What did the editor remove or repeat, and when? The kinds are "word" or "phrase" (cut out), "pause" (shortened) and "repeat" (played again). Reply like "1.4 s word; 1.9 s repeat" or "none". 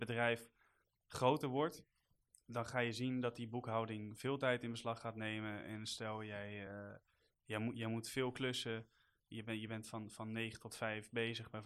none